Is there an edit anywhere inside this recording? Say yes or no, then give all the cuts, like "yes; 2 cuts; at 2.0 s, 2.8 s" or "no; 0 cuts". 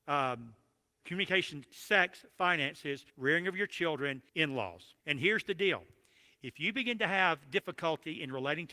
yes; 4 cuts; at 1.0 s, 3.1 s, 4.3 s, 5.0 s